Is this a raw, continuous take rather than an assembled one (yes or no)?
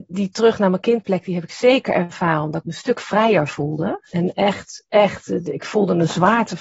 yes